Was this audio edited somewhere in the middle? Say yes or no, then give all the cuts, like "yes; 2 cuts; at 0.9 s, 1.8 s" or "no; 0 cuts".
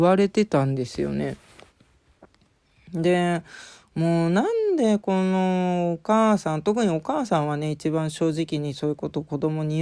no; 0 cuts